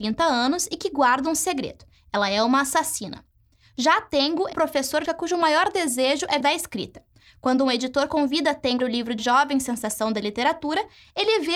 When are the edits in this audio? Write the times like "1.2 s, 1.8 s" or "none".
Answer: 4.5 s, 5.1 s, 6.4 s, 8.8 s, 9.2 s